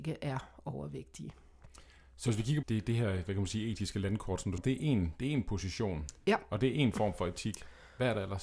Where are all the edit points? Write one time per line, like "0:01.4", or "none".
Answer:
0:02.6
0:04.6